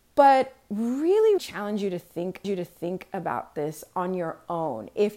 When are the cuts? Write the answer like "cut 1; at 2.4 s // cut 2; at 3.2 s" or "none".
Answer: cut 1; at 1.4 s // cut 2; at 2.4 s